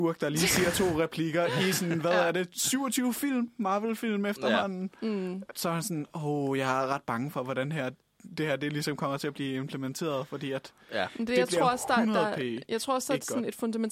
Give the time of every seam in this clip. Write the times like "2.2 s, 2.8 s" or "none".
none